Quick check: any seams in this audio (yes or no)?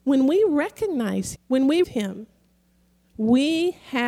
yes